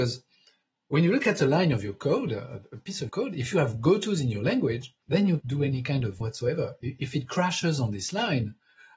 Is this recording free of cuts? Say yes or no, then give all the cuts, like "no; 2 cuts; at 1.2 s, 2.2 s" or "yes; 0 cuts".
no; 4 cuts; at 3.1 s, 5.0 s, 5.4 s, 6.2 s